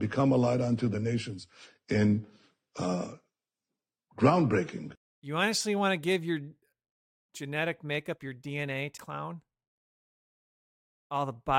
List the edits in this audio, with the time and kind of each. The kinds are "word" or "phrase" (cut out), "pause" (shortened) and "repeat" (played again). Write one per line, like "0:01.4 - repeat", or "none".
0:09.0 - word